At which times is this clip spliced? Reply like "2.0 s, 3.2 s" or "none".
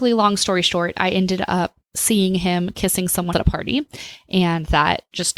1.8 s, 3.3 s